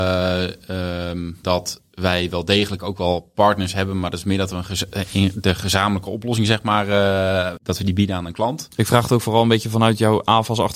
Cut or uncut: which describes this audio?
cut